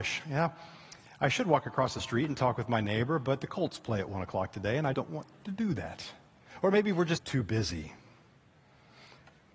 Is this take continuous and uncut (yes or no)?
no